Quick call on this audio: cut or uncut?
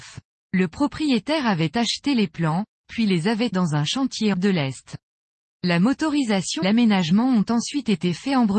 cut